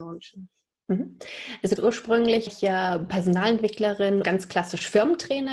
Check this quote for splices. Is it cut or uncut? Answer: cut